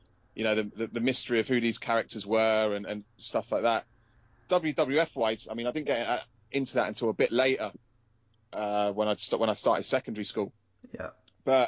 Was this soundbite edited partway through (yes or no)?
no